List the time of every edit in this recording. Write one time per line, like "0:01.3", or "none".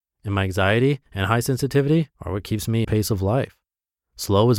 0:01.1
0:02.1
0:02.8